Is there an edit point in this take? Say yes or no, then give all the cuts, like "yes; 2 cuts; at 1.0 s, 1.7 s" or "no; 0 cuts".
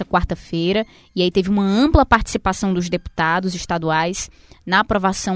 no; 0 cuts